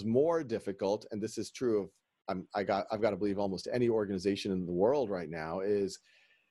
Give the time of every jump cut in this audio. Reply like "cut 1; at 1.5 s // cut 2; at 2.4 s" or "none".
none